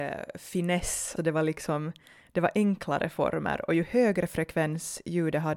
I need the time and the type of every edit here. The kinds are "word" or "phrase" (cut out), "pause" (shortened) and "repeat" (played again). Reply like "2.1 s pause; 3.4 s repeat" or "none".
1.2 s word